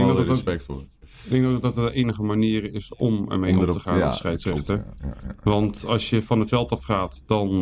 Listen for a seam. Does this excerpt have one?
no; 0 cuts

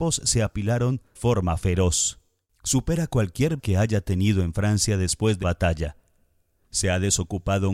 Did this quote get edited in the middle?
yes; 3 cuts; at 1.2 s, 3.6 s, 5.4 s

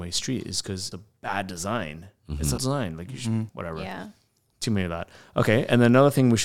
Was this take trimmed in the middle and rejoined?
yes; 3 cuts; at 0.9 s, 2.6 s, 3.5 s

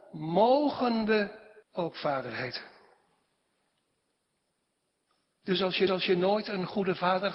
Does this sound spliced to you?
yes; 2 cuts; at 1.6 s, 5.9 s

